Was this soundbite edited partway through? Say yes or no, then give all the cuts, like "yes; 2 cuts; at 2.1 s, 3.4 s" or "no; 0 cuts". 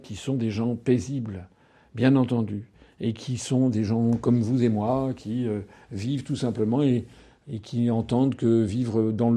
no; 0 cuts